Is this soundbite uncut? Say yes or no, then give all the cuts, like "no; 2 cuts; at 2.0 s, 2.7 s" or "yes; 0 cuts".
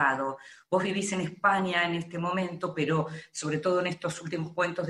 yes; 0 cuts